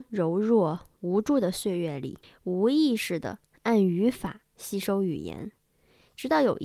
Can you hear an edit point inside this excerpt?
yes; 1 cut; at 2.2 s

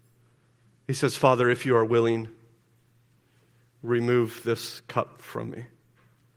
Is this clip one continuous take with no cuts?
yes; 0 cuts

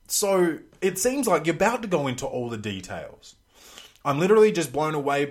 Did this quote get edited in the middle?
no; 0 cuts

